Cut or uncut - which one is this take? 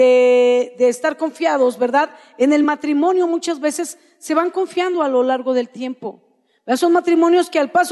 uncut